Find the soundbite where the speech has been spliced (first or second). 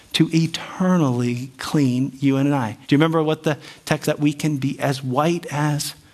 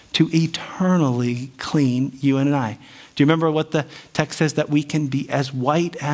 first